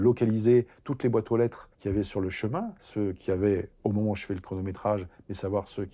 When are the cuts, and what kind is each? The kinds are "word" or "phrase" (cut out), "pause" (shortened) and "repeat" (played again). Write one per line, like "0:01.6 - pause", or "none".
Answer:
0:01.7 - pause